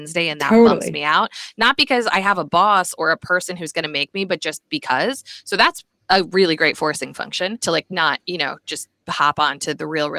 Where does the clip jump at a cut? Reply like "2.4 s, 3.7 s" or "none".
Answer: none